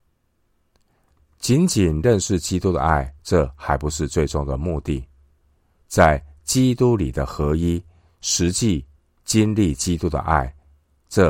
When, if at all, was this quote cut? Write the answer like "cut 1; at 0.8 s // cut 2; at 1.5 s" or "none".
cut 1; at 3.2 s // cut 2; at 9.0 s